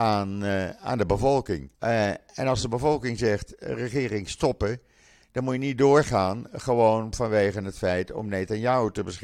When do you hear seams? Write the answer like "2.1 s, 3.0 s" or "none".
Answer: 1.7 s